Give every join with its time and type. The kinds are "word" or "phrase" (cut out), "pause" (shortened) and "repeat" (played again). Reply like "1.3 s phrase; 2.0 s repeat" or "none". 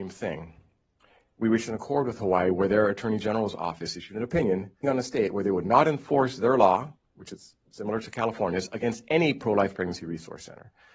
4.8 s word